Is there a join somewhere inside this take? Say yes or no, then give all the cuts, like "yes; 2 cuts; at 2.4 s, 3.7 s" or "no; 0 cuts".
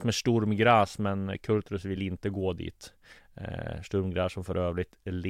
no; 0 cuts